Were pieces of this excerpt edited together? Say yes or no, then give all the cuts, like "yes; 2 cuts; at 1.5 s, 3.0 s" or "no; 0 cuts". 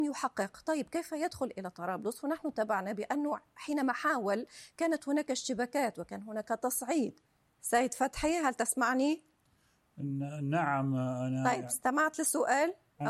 yes; 1 cut; at 7.5 s